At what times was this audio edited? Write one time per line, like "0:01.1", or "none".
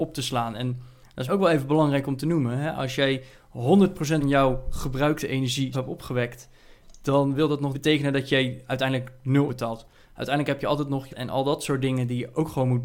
0:01.3
0:04.2
0:05.7
0:07.7
0:09.5
0:11.1